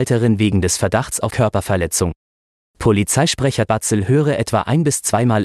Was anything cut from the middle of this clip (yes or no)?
yes